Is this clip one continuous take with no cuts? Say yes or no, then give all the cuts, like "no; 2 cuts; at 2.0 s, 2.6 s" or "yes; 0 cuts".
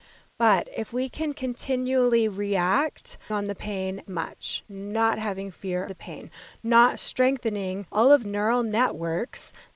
no; 5 cuts; at 3.3 s, 4.1 s, 5.9 s, 7.9 s, 8.2 s